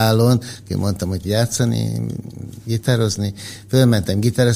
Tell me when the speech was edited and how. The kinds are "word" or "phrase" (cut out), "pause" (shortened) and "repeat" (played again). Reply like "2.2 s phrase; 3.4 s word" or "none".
1.2 s word